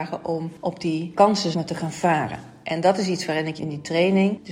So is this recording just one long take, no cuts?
no; 2 cuts; at 1.5 s, 3.6 s

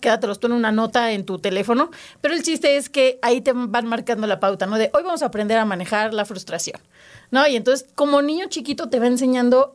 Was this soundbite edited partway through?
no; 0 cuts

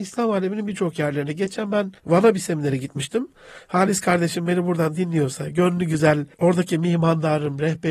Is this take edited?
yes; 2 cuts; at 2.0 s, 6.3 s

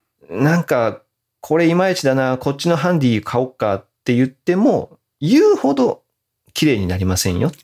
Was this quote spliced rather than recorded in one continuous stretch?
no; 0 cuts

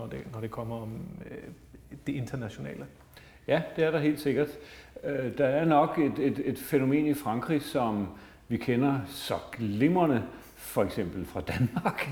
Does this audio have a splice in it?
no; 0 cuts

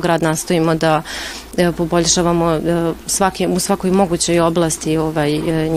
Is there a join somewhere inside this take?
no; 0 cuts

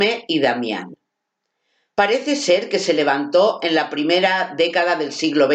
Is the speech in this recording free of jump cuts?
yes; 0 cuts

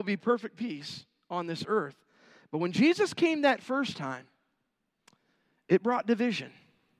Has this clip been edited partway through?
no; 0 cuts

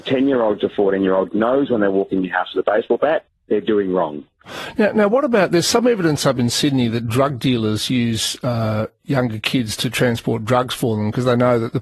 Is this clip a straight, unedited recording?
yes; 0 cuts

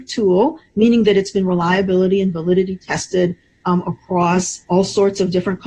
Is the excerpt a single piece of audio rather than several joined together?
no; 1 cut; at 4.6 s

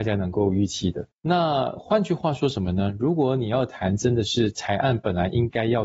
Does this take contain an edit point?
yes; 1 cut; at 1.1 s

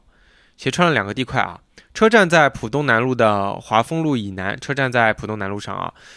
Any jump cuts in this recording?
no; 0 cuts

